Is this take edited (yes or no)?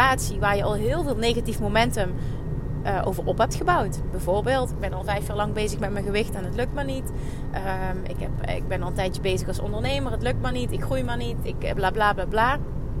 yes